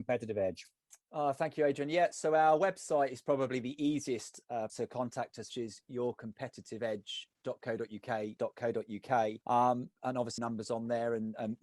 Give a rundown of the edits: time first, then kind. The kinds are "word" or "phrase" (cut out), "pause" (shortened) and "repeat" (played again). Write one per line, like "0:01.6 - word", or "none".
0:04.7 - word
0:05.5 - phrase
0:08.4 - phrase
0:09.4 - pause
0:10.4 - phrase